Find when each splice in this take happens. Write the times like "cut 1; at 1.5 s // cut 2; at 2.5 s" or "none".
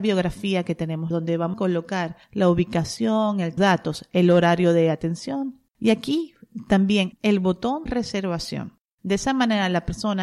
cut 1; at 1.1 s // cut 2; at 1.5 s // cut 3; at 2.2 s // cut 4; at 3.6 s // cut 5; at 5.7 s // cut 6; at 7.1 s // cut 7; at 7.9 s